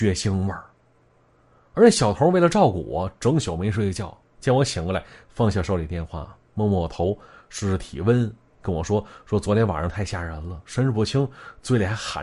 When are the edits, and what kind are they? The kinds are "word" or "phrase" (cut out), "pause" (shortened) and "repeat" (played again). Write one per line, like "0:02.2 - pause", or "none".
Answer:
none